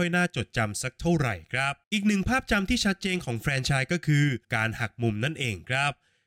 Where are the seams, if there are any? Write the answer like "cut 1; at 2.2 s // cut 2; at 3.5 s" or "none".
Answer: cut 1; at 1.8 s // cut 2; at 4.4 s